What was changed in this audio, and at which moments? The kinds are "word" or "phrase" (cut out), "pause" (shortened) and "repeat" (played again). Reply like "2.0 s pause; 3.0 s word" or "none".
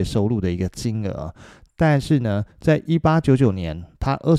none